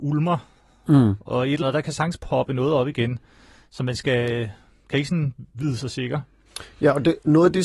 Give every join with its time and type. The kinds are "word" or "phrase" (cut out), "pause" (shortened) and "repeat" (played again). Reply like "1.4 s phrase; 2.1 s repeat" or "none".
1.6 s word